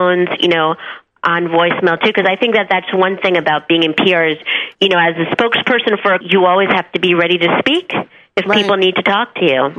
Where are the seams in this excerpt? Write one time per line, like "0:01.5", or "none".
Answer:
0:04.7
0:06.2